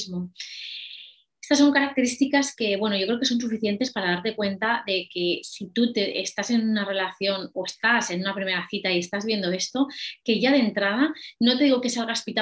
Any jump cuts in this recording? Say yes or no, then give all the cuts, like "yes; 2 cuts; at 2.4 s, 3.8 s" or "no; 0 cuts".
no; 0 cuts